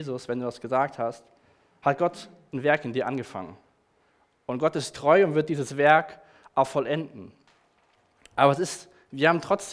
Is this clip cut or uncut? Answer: uncut